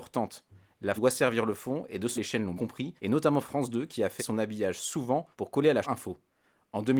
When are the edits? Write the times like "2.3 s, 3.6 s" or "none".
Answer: 1.0 s, 2.2 s, 2.6 s, 3.0 s, 4.2 s, 5.3 s, 5.8 s